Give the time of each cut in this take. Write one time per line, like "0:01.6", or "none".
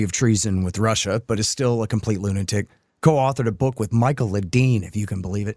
none

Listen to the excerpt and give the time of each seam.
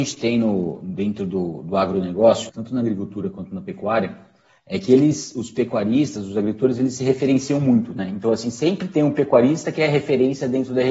0:02.5

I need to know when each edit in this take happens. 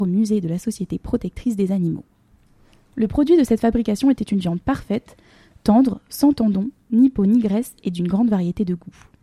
none

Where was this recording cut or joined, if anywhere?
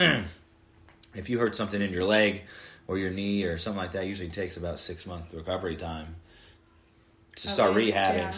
none

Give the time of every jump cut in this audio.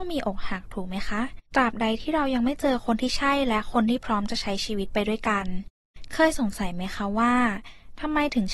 0:01.5

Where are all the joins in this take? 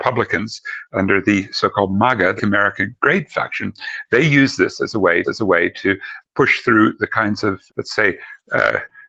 0:02.4
0:05.2
0:07.7

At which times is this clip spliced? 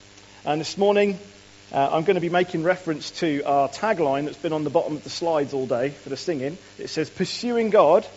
none

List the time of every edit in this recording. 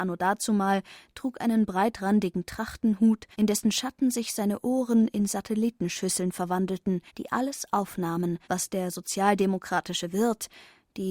0:03.3
0:07.1
0:08.4

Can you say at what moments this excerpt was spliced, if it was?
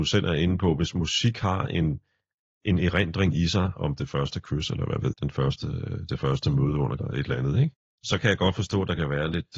0:05.1
0:07.0

